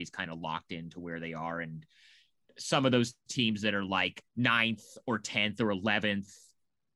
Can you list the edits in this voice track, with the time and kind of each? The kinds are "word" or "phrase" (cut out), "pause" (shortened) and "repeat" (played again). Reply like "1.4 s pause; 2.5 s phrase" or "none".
4.3 s pause